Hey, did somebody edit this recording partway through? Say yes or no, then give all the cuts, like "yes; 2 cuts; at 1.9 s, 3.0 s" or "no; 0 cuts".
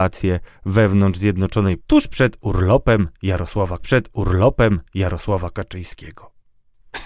yes; 2 cuts; at 1.8 s, 3.8 s